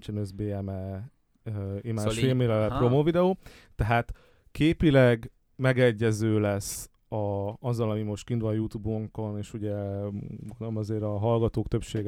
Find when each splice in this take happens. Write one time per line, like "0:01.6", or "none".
none